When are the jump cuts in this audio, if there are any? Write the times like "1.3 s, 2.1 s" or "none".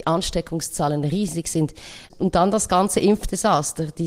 none